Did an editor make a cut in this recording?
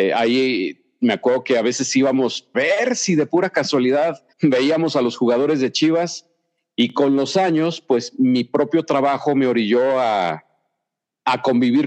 yes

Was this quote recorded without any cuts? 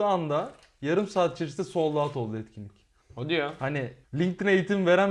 no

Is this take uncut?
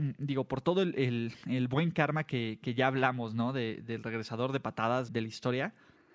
no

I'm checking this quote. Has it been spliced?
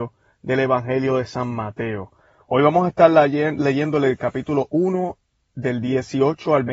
no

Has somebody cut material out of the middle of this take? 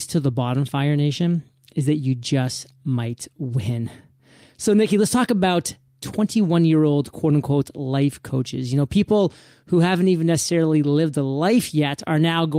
no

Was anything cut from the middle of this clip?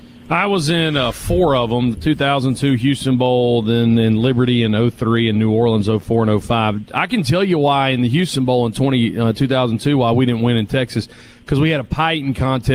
no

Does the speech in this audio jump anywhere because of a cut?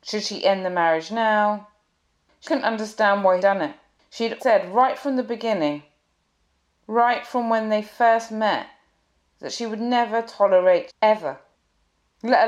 yes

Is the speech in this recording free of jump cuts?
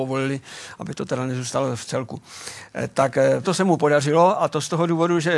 no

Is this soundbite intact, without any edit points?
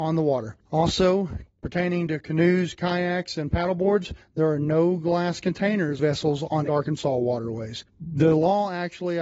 no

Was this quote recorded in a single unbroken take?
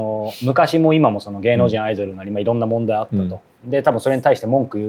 yes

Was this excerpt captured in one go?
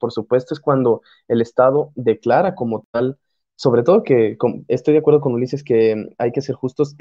yes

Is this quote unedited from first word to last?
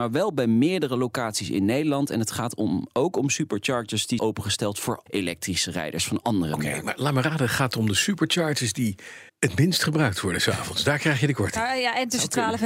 no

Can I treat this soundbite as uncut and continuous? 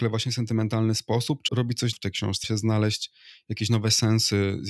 no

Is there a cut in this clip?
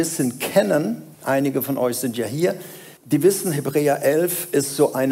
yes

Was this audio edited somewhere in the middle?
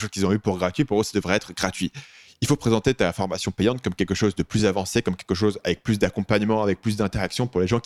no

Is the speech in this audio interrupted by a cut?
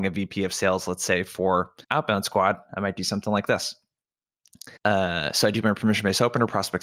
yes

